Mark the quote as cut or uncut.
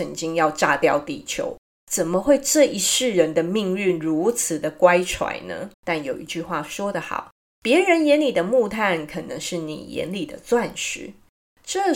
cut